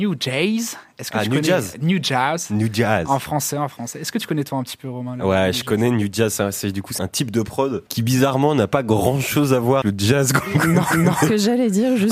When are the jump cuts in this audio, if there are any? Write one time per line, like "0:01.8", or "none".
0:07.0
0:07.9
0:09.8
0:10.9